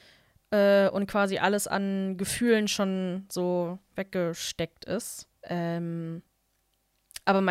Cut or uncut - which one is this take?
cut